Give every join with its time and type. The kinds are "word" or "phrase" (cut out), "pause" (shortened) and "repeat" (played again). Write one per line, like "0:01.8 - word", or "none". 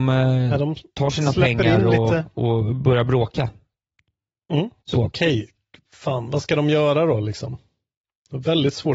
0:04.8 - pause